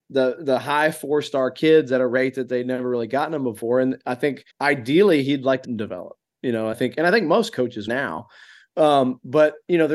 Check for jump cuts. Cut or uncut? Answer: cut